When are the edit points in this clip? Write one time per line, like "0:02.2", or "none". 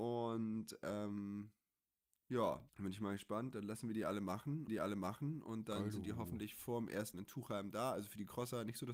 0:02.7
0:04.7
0:07.1